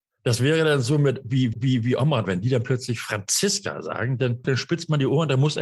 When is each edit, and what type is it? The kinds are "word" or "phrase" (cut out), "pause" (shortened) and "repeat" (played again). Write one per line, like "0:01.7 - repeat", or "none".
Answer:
0:01.5 - repeat
0:02.2 - word
0:04.4 - word